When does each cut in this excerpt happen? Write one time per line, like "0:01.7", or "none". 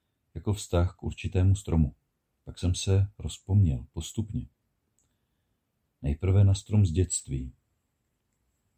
0:02.1